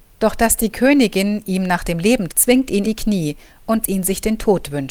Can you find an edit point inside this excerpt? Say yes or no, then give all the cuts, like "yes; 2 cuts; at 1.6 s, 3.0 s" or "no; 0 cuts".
yes; 3 cuts; at 2.3 s, 2.8 s, 3.8 s